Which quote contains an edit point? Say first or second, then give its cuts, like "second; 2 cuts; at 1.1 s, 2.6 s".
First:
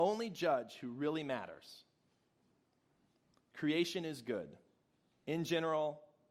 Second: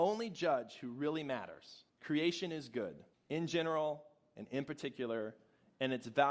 second; 2 cuts; at 1.9 s, 3.1 s